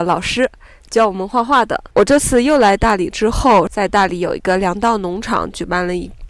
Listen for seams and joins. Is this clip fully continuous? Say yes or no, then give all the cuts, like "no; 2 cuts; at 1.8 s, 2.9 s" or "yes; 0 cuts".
no; 1 cut; at 1.9 s